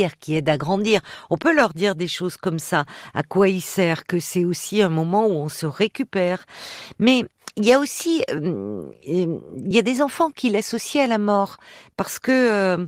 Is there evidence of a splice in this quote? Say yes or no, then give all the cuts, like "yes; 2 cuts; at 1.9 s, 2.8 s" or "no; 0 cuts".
no; 0 cuts